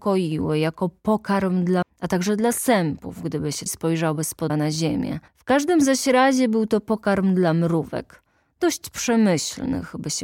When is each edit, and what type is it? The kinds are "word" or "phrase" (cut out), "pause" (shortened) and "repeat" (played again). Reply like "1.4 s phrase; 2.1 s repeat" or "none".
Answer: 1.8 s word; 3.7 s phrase; 4.5 s word; 5.3 s pause